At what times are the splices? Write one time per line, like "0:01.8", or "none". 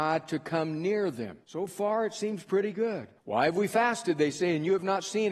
0:01.4
0:03.2